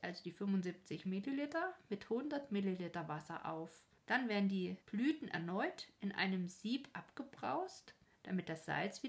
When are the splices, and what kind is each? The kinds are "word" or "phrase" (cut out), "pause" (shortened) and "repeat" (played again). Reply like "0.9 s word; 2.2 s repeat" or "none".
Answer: 4.0 s pause; 4.8 s pause; 8.0 s pause